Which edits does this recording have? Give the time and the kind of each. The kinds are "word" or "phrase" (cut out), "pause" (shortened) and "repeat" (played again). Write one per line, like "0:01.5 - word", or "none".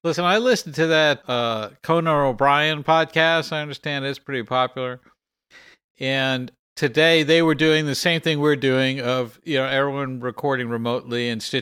0:01.2 - word
0:06.6 - word